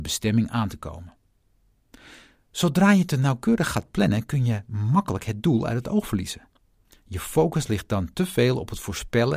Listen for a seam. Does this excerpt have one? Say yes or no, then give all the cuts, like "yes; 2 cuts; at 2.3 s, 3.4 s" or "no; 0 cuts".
no; 0 cuts